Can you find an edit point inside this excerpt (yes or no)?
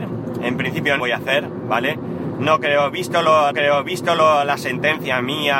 yes